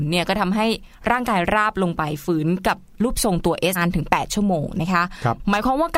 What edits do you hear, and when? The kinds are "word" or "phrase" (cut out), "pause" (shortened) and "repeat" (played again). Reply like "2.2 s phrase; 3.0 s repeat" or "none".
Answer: 3.8 s word